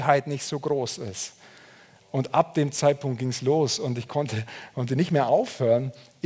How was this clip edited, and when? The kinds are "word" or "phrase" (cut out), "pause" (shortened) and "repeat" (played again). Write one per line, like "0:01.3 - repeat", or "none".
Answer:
none